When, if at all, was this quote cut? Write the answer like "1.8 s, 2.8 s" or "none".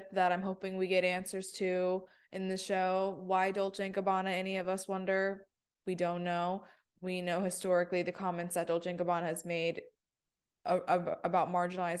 6.8 s